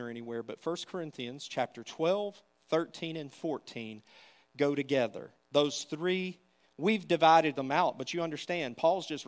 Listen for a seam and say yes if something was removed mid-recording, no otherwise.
no